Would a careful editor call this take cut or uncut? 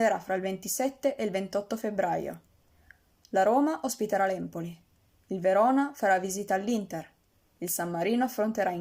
uncut